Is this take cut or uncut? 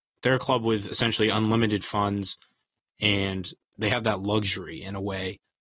uncut